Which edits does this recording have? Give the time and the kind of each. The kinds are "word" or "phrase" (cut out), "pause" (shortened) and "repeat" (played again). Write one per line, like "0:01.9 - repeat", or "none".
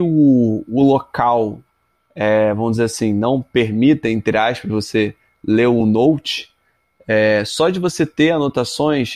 none